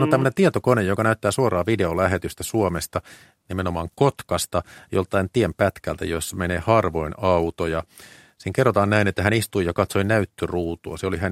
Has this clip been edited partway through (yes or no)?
no